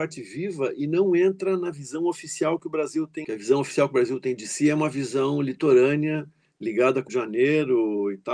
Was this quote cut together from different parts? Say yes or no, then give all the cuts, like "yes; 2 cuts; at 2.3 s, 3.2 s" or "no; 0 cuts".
yes; 1 cut; at 7.1 s